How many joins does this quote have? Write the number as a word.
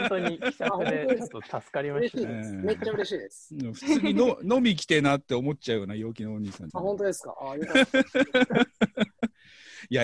one